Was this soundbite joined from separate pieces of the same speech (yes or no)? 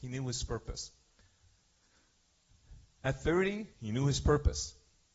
yes